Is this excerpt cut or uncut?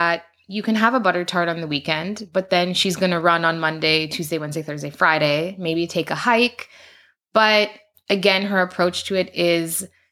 uncut